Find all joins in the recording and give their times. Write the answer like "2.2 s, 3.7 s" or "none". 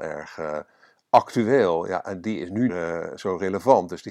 2.7 s